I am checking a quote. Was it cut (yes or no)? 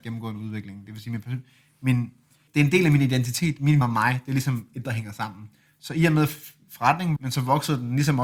yes